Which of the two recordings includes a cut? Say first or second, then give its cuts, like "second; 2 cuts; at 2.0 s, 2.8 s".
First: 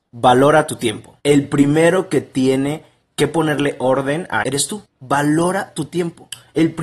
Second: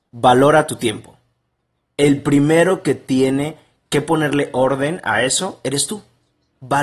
first; 3 cuts; at 1.2 s, 4.4 s, 4.9 s